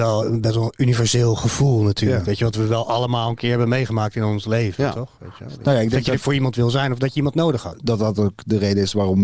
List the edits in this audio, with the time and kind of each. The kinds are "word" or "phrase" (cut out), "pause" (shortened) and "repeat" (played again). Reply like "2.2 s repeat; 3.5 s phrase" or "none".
none